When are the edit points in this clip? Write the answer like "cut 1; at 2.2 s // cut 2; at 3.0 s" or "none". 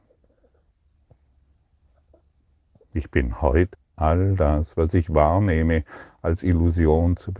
cut 1; at 3.7 s